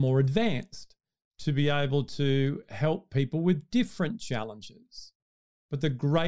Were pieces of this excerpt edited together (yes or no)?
no